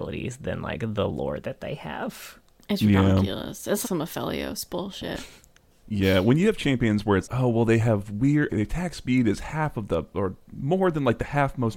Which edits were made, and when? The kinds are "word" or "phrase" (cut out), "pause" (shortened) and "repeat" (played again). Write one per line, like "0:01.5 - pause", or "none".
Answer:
0:03.8 - word
0:07.2 - word
0:08.5 - word
0:10.4 - word